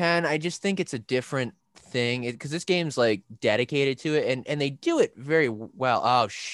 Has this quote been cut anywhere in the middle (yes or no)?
no